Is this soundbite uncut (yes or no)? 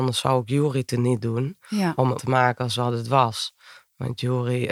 no